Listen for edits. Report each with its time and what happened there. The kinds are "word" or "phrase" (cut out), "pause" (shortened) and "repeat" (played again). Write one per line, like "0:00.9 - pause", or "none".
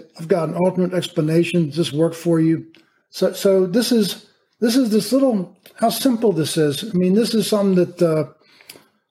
none